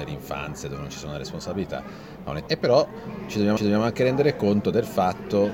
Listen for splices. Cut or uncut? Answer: cut